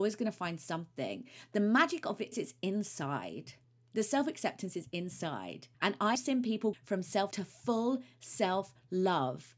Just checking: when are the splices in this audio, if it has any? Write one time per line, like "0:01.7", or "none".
0:02.3
0:03.6
0:05.7
0:06.2
0:06.7
0:07.3